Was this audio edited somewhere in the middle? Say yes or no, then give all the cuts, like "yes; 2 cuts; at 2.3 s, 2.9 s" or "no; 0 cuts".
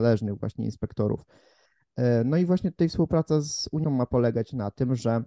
yes; 1 cut; at 3.8 s